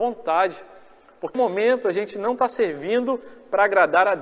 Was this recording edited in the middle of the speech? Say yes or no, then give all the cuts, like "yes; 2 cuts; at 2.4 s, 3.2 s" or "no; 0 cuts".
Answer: yes; 1 cut; at 1.3 s